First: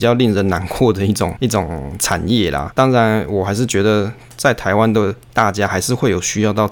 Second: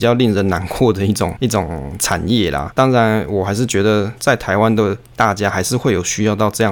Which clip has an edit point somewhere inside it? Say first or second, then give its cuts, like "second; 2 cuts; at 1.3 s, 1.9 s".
second; 1 cut; at 4.2 s